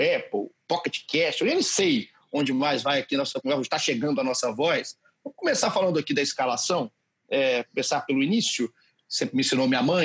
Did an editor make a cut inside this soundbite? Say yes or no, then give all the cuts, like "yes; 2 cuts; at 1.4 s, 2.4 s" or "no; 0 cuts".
no; 0 cuts